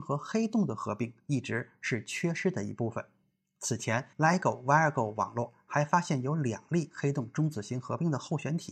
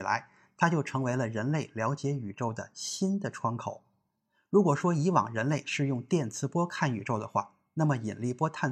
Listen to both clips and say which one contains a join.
first; 1 cut; at 4.1 s

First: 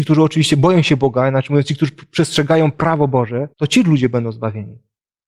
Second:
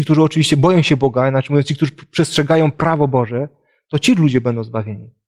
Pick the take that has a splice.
first; 1 cut; at 3.5 s

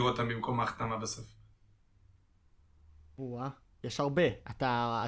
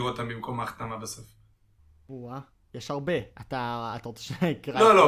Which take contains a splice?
second; 1 cut; at 1.8 s

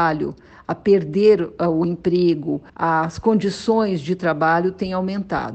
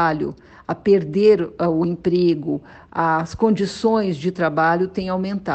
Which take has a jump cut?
first; 1 cut; at 2.7 s

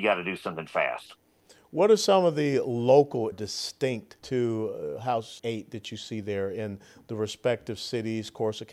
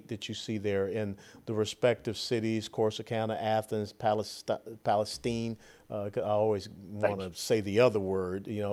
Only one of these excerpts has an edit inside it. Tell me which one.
first; 3 cuts; at 3.3 s, 4.2 s, 5.4 s

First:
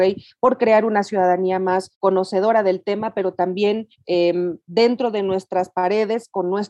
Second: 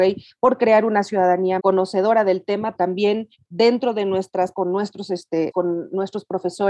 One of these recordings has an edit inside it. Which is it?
second; 5 cuts; at 1.6 s, 2.8 s, 3.4 s, 4.5 s, 5.5 s

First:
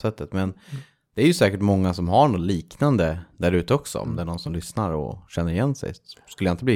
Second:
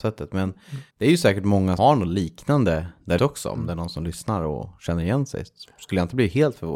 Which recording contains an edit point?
second; 3 cuts; at 0.9 s, 1.8 s, 3.2 s

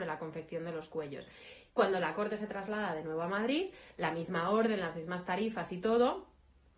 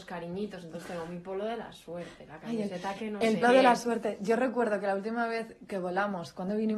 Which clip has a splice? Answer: second; 1 cut; at 3.4 s

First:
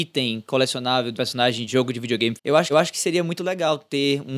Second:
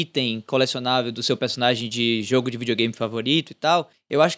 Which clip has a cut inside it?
first; 4 cuts; at 1.1 s, 1.7 s, 2.4 s, 2.7 s

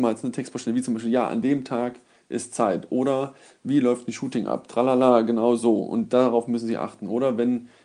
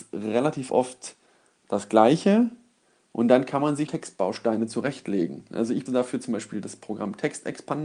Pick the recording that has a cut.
second; 2 cuts; at 3.9 s, 5.9 s

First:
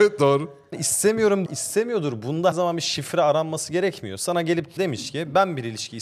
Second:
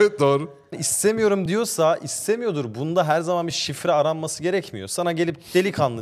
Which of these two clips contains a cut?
first; 3 cuts; at 1.5 s, 2.5 s, 4.8 s

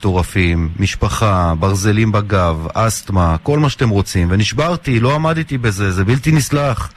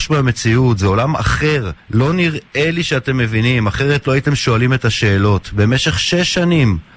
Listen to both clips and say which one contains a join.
second; 1 cut; at 1.8 s

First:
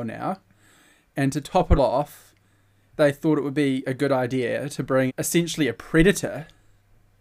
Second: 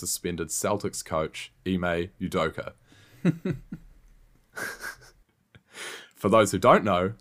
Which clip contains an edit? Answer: first; 2 cuts; at 1.8 s, 5.1 s

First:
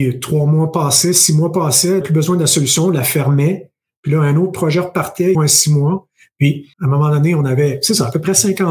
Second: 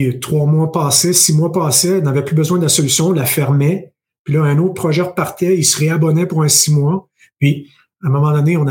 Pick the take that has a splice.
first; 3 cuts; at 2.0 s, 5.3 s, 6.7 s

